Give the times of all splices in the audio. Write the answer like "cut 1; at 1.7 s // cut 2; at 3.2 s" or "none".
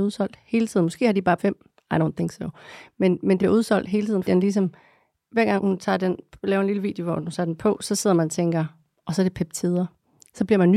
cut 1; at 1.4 s // cut 2; at 3.4 s // cut 3; at 4.2 s // cut 4; at 5.6 s